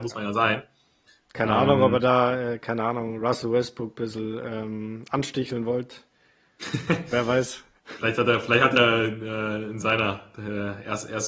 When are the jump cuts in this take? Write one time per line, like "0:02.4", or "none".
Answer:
0:07.8

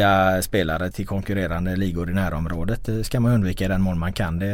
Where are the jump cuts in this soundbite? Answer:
0:00.9

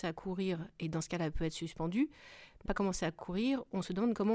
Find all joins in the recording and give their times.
0:02.7

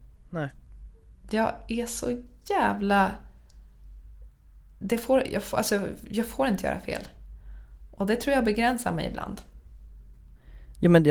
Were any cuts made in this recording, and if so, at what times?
none

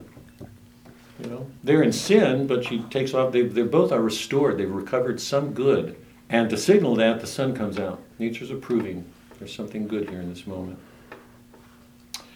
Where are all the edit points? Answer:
0:01.6
0:06.1
0:08.1

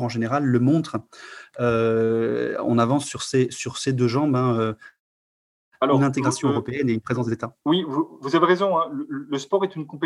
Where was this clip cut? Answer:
0:07.6
0:08.2

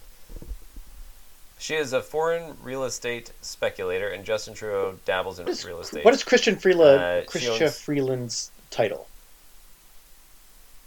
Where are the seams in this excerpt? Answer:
0:01.5
0:05.5

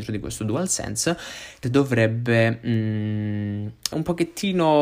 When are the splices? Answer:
0:01.6
0:03.9

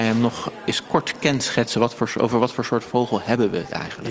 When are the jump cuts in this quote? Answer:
none

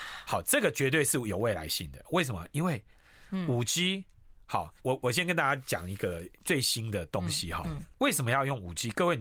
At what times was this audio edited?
0:04.8
0:06.4
0:07.9

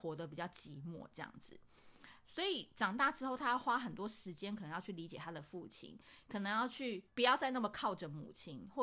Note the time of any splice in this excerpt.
0:07.1

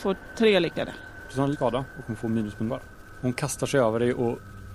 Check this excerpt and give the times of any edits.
0:01.5
0:02.7

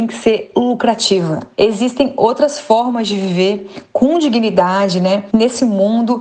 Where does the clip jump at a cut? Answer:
none

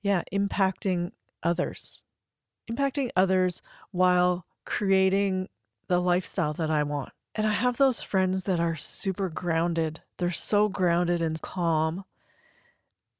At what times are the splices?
0:11.4

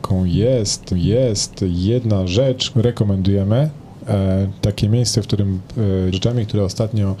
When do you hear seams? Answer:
0:00.9
0:02.7
0:04.6
0:06.1

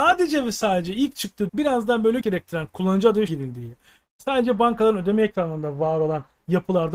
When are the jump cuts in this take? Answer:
0:01.5
0:02.2
0:03.3

